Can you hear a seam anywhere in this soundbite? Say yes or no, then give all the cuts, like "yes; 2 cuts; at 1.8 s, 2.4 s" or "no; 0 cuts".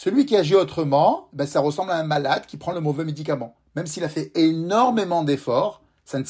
no; 0 cuts